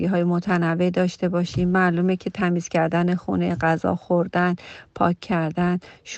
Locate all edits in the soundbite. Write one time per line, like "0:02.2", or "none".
none